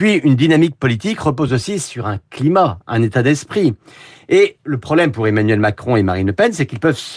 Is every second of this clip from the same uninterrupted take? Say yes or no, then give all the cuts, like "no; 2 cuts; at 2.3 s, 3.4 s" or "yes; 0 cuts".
yes; 0 cuts